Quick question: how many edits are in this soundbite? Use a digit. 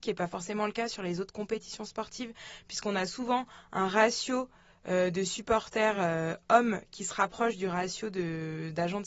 0